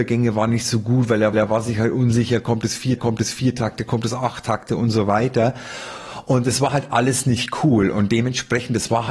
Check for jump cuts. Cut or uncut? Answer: cut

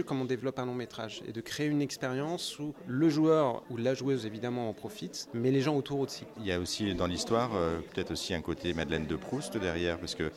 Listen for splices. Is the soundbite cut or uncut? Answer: uncut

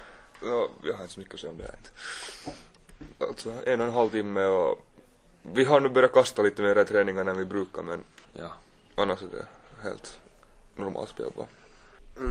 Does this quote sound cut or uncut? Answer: cut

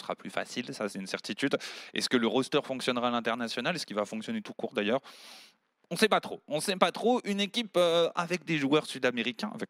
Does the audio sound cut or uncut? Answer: uncut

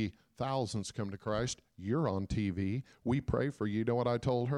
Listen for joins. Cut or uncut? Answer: uncut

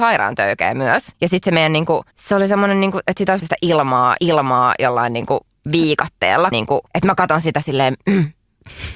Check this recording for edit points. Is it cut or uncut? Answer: cut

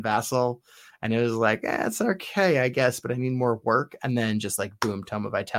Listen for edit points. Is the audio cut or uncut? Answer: uncut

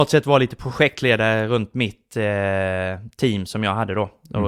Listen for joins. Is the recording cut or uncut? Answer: uncut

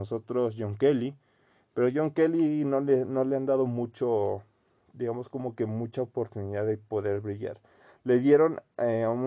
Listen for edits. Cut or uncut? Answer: uncut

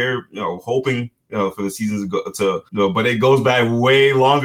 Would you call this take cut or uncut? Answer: cut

